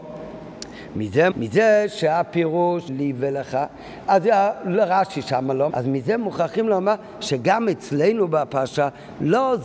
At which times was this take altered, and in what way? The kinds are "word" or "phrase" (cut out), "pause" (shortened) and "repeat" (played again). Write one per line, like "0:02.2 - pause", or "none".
0:01.3 - word
0:02.9 - word
0:05.7 - word